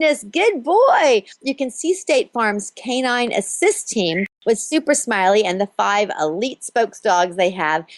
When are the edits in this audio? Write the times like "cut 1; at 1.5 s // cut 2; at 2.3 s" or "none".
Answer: none